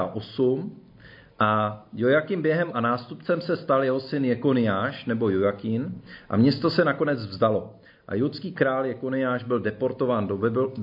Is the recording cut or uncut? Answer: cut